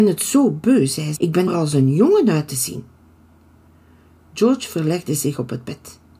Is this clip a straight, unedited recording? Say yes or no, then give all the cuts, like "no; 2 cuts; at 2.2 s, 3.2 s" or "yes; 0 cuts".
no; 2 cuts; at 1.2 s, 1.5 s